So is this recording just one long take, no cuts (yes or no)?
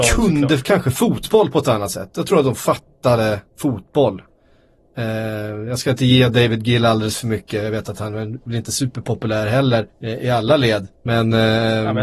no